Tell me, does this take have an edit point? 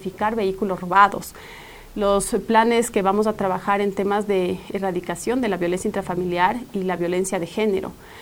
no; 0 cuts

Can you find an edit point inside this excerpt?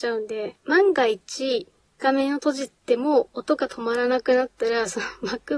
yes; 1 cut; at 2.8 s

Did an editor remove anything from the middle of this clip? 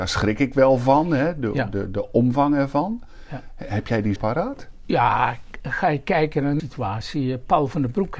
yes; 2 cuts; at 4.2 s, 6.6 s

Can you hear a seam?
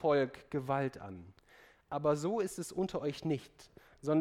no; 0 cuts

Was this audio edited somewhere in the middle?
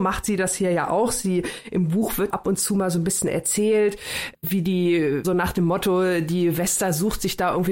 yes; 2 cuts; at 2.3 s, 5.2 s

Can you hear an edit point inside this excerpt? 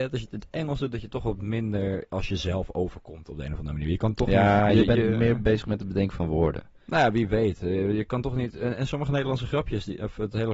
no; 0 cuts

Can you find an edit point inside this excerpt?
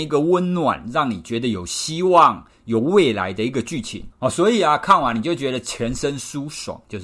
yes; 1 cut; at 4.1 s

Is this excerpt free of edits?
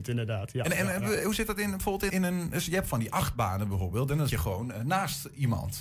no; 2 cuts; at 2.1 s, 4.3 s

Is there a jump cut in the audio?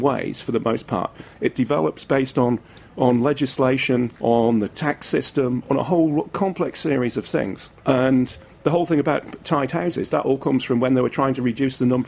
yes; 2 cuts; at 4.1 s, 7.8 s

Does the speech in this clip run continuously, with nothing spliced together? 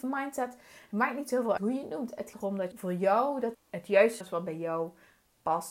no; 5 cuts; at 1.6 s, 2.3 s, 2.7 s, 3.5 s, 4.2 s

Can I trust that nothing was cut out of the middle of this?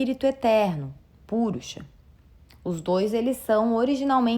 yes; 0 cuts

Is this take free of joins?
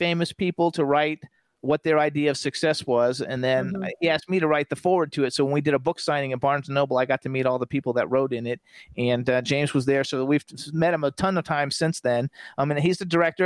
yes; 0 cuts

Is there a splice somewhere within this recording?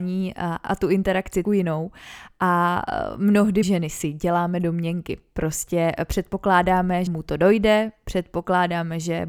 yes; 3 cuts; at 1.4 s, 3.6 s, 7.1 s

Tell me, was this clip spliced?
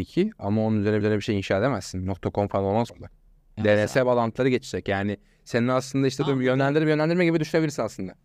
yes; 3 cuts; at 1.0 s, 2.9 s, 3.3 s

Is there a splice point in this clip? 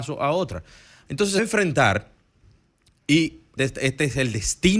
yes; 2 cuts; at 1.4 s, 3.6 s

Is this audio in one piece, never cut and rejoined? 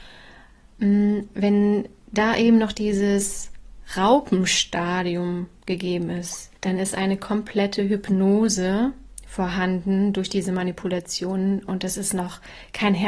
no; 2 cuts; at 2.0 s, 6.6 s

